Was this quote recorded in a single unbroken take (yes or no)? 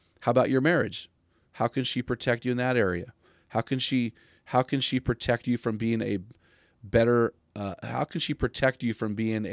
yes